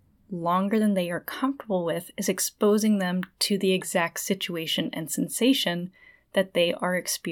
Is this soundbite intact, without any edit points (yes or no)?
yes